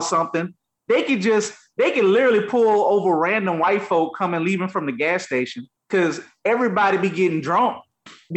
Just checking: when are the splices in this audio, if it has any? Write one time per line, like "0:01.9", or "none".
0:05.8